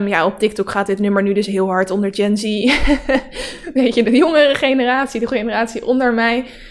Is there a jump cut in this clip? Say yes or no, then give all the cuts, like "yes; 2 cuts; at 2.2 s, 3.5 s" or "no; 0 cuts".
no; 0 cuts